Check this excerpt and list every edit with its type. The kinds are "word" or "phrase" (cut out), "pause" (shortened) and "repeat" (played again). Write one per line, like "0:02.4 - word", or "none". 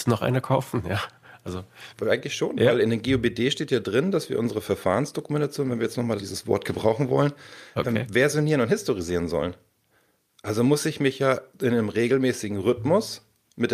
0:01.9 - word
0:06.2 - phrase

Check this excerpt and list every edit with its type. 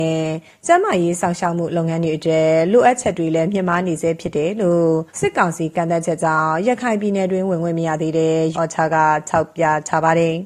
0:05.1 - pause
0:08.5 - word

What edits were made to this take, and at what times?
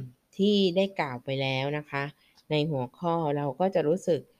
none

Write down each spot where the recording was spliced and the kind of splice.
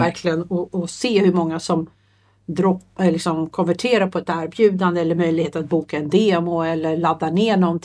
none

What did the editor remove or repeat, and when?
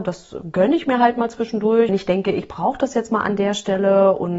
0:01.9 - phrase

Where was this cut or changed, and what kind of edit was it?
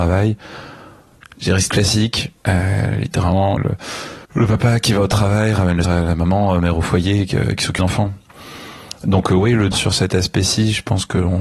0:01.7 - word
0:02.4 - pause
0:03.6 - word
0:04.2 - pause
0:05.8 - word
0:07.8 - word
0:09.7 - word

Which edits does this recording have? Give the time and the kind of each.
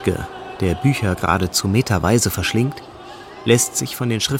none

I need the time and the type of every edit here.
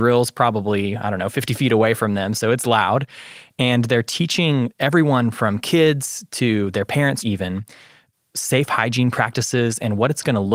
0:07.2 - phrase

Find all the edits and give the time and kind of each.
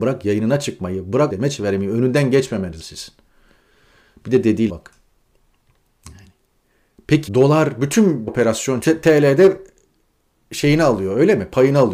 0:01.3 - word
0:02.8 - word
0:04.7 - word
0:07.3 - word
0:08.3 - word
0:08.8 - word

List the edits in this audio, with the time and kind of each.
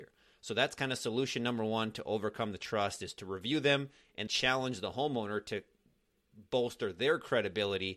0:04.3 - word

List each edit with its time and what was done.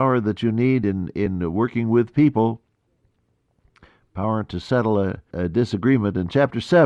0:05.3 - word

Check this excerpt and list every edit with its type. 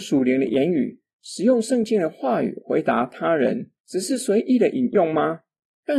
0:03.8 - pause

